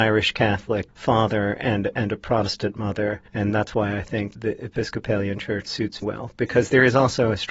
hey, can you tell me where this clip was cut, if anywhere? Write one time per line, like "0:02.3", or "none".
0:03.3
0:06.0